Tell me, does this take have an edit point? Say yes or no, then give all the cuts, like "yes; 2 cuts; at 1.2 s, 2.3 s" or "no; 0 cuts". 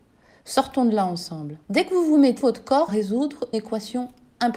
yes; 4 cuts; at 1.6 s, 2.4 s, 2.9 s, 3.5 s